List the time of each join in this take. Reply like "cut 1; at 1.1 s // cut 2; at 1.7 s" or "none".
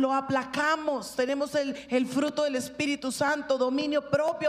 none